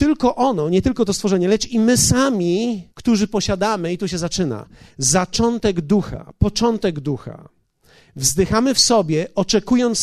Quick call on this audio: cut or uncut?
cut